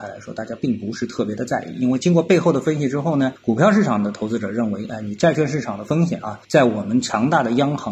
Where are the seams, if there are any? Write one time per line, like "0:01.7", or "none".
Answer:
0:03.4
0:06.4